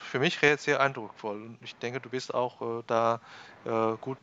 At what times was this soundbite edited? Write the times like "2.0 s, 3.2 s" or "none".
none